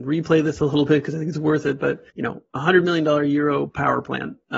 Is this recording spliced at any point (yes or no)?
yes